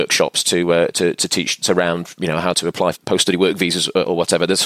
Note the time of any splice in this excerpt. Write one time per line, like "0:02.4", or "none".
0:01.6
0:02.9